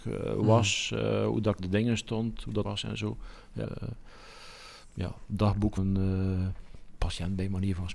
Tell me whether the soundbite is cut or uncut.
cut